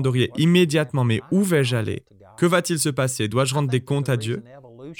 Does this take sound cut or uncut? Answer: uncut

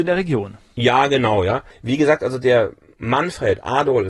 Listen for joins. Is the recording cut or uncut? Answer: uncut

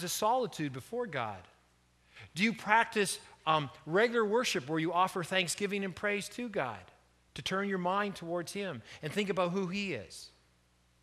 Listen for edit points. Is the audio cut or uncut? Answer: uncut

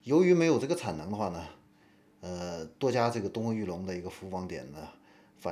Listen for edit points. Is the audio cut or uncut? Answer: uncut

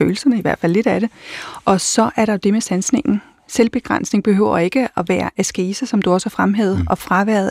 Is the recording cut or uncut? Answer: uncut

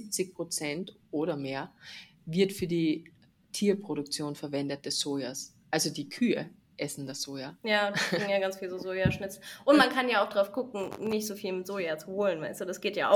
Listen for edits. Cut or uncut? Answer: uncut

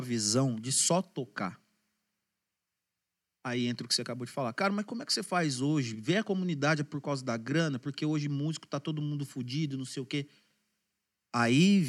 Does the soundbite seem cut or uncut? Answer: uncut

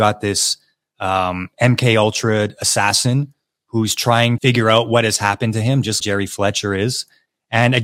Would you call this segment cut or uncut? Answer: cut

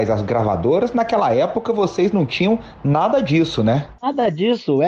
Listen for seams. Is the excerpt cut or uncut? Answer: uncut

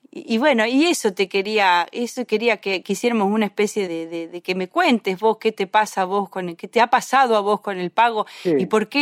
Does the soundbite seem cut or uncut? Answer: cut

